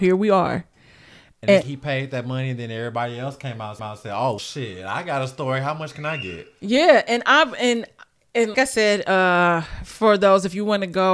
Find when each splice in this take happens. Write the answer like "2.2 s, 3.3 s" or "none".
1.6 s, 3.8 s, 4.4 s, 8.5 s